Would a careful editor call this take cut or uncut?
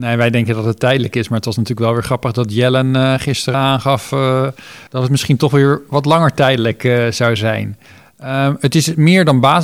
cut